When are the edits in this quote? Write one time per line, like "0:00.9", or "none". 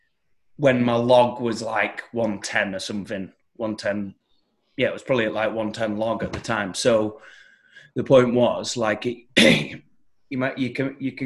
none